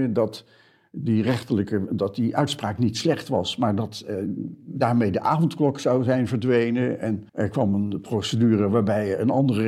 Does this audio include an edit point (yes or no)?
yes